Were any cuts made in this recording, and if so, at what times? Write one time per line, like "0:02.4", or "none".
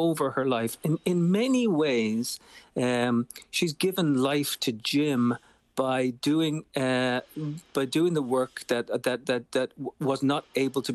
none